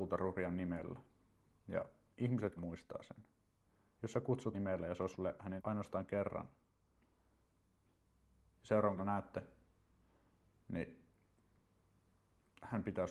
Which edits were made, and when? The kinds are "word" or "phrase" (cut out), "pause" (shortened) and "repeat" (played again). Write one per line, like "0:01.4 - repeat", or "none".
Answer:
0:02.6 - word
0:04.5 - word
0:05.1 - word
0:05.6 - word
0:09.0 - word